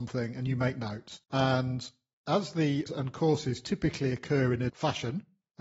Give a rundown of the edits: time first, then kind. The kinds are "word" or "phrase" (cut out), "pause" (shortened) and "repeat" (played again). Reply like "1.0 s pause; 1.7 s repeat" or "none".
1.2 s pause; 2.9 s word; 4.7 s word